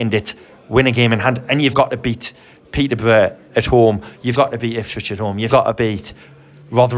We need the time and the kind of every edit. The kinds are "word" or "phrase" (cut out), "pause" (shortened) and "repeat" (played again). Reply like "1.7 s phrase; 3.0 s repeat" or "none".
1.7 s word; 4.3 s word; 5.5 s word